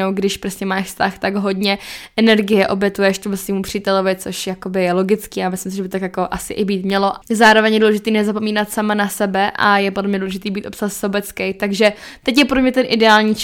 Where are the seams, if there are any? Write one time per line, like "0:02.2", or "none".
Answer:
0:07.2